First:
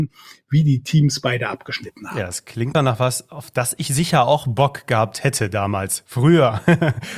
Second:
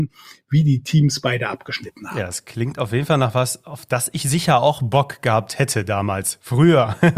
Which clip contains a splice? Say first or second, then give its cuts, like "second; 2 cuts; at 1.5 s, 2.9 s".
first; 1 cut; at 2.7 s